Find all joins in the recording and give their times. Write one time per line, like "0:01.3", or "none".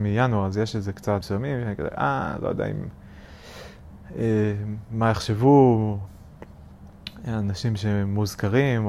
0:01.2